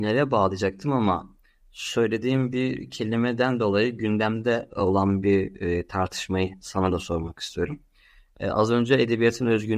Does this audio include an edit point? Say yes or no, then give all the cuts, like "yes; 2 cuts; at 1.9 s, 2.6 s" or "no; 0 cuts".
no; 0 cuts